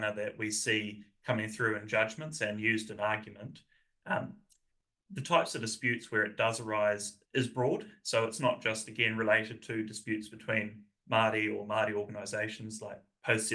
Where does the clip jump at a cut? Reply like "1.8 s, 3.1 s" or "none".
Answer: 4.7 s, 7.2 s